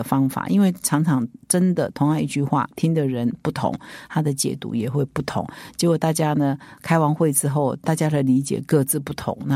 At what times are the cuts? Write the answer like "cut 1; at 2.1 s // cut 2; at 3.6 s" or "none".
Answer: cut 1; at 2.7 s